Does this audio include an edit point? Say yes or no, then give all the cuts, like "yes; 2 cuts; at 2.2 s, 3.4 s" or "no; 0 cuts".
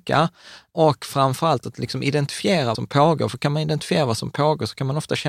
yes; 1 cut; at 2.7 s